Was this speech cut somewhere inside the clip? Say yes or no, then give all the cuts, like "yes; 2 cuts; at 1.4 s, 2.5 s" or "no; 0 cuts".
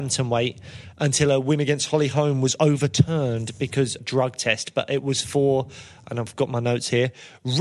yes; 1 cut; at 4.0 s